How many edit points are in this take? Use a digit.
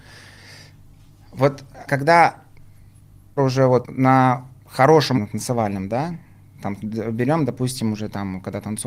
4